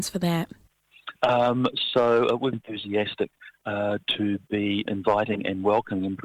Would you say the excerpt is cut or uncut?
cut